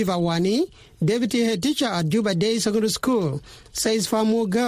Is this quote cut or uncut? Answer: uncut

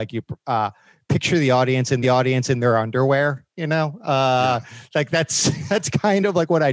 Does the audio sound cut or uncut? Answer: cut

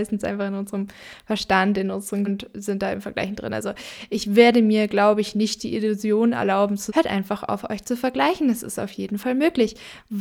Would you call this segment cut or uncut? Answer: cut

